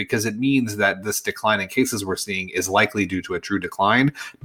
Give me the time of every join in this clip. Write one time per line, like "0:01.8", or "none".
none